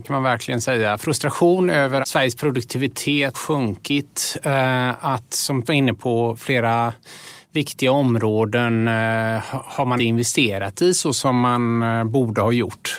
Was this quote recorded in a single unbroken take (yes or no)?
no